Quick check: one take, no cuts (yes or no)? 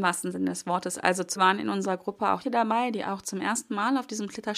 no